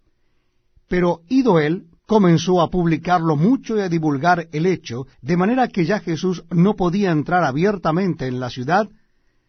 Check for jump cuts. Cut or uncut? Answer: cut